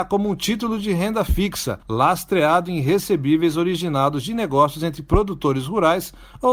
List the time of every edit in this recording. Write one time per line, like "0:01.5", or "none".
0:01.8